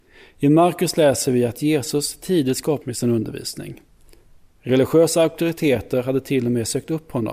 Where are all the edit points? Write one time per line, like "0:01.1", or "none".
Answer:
0:02.8